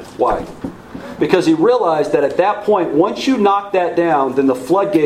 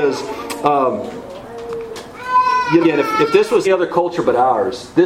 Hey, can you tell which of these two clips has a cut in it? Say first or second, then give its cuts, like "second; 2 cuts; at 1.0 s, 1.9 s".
second; 2 cuts; at 2.8 s, 3.6 s